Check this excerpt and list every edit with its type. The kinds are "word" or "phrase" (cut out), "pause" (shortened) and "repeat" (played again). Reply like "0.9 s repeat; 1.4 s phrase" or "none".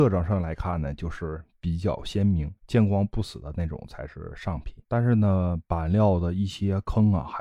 2.6 s pause; 4.8 s pause